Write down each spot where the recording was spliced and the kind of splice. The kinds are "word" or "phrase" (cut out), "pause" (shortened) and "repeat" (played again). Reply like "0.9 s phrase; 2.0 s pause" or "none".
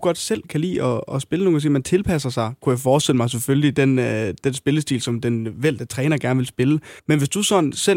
7.0 s pause